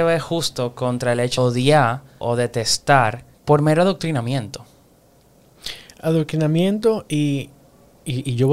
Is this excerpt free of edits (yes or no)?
no